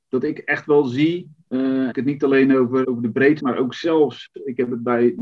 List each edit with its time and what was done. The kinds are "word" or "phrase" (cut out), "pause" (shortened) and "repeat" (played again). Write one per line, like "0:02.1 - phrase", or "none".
0:01.9 - phrase
0:02.8 - word
0:03.4 - word